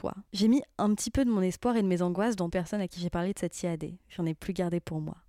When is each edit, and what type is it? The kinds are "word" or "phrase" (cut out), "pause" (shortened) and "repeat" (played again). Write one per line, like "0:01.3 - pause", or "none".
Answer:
0:02.5 - phrase